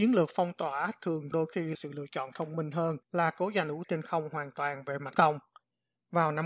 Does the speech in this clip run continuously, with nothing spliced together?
no; 5 cuts; at 1.3 s, 1.7 s, 3.0 s, 3.8 s, 5.1 s

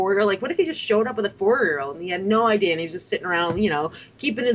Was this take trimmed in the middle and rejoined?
no; 0 cuts

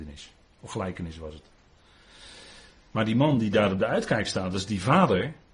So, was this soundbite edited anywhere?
no; 0 cuts

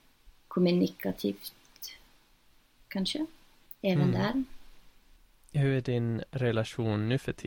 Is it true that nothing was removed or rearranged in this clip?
yes; 0 cuts

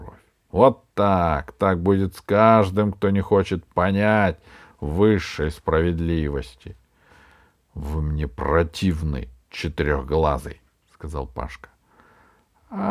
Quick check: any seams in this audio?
no; 0 cuts

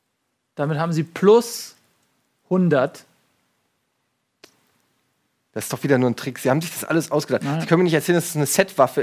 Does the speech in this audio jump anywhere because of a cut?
no; 0 cuts

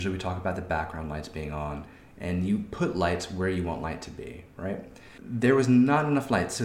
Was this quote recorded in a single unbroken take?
yes; 0 cuts

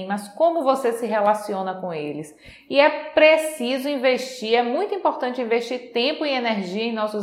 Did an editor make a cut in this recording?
no; 0 cuts

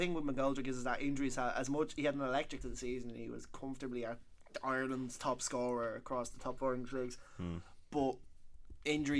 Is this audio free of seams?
no; 1 cut; at 2.6 s

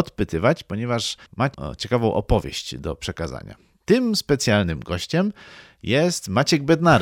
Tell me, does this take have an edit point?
no; 0 cuts

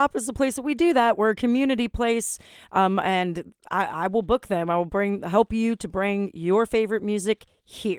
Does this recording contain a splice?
no; 0 cuts

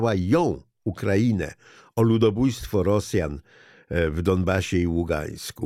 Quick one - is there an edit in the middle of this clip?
no; 0 cuts

